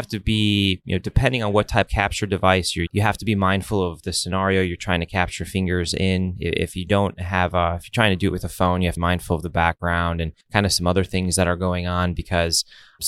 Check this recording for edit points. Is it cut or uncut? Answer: cut